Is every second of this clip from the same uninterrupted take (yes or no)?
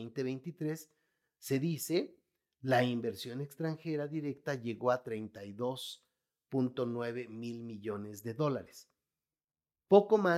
yes